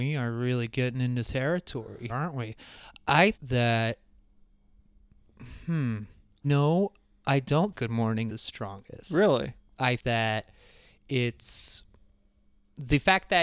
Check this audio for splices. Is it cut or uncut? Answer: cut